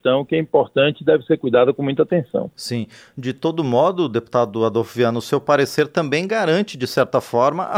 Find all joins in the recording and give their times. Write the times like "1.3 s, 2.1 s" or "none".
none